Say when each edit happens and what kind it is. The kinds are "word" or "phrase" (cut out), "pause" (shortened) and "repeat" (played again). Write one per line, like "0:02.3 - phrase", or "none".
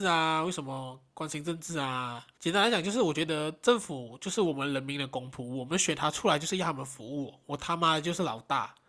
0:02.3 - pause